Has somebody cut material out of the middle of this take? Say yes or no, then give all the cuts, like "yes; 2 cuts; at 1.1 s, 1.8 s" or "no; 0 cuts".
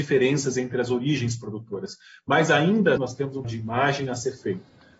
yes; 2 cuts; at 3.0 s, 3.4 s